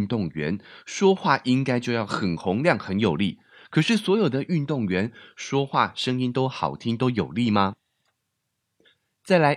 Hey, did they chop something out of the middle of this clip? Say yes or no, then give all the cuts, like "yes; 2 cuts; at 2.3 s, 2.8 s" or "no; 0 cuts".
no; 0 cuts